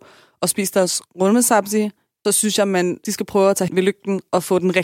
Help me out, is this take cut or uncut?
cut